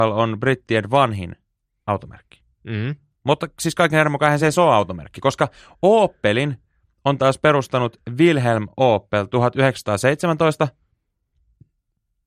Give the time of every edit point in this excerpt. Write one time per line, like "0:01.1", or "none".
none